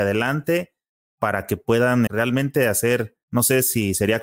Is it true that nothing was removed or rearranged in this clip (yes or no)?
no